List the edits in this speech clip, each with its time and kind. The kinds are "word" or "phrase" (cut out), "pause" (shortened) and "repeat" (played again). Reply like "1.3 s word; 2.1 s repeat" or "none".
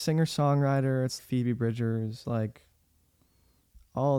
1.2 s word; 2.2 s word

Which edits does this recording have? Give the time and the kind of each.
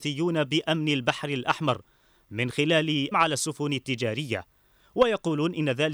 3.1 s word

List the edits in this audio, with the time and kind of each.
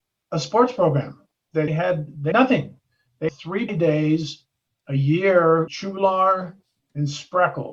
1.7 s word; 2.3 s word; 3.3 s word; 3.7 s word; 5.7 s word

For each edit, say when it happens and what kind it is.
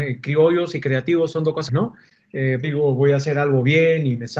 1.7 s word; 2.6 s phrase

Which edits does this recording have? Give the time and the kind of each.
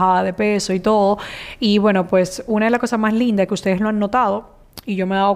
none

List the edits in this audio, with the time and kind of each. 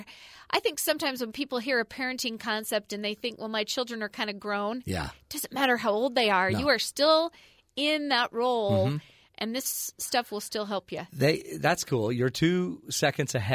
none

